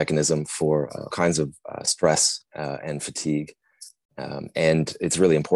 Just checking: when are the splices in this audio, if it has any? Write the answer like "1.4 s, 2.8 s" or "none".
1.1 s